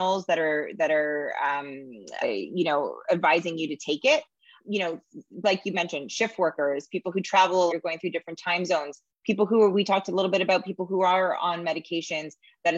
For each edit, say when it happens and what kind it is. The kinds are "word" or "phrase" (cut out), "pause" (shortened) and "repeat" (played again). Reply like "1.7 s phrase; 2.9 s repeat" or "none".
2.2 s word; 4.6 s word; 7.7 s word